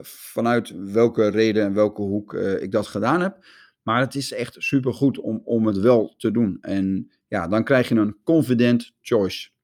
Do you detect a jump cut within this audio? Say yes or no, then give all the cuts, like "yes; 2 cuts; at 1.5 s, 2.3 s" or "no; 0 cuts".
no; 0 cuts